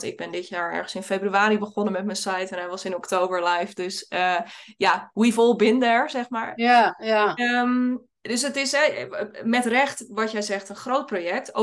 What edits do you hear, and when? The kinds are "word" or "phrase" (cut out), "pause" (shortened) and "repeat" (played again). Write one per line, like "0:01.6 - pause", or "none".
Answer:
0:08.2 - pause